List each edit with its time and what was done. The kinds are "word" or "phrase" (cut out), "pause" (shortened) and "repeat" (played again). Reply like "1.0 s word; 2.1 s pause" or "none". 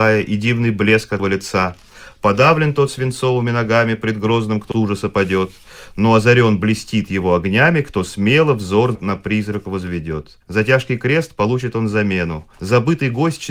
1.2 s word; 4.7 s word; 10.4 s pause; 12.5 s pause